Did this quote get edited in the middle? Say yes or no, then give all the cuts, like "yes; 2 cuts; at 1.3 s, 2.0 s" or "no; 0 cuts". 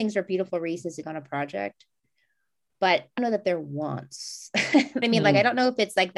yes; 3 cuts; at 1.0 s, 3.2 s, 5.0 s